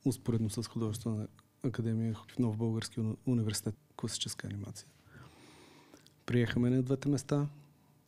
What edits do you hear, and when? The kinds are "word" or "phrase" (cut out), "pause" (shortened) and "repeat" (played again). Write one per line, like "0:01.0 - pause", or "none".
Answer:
0:02.3 - word
0:03.7 - word